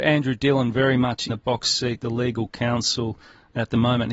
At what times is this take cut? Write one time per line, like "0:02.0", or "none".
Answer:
0:01.3